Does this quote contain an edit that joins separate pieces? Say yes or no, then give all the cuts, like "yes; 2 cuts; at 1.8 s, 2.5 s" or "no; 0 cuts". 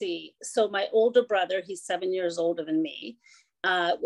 no; 0 cuts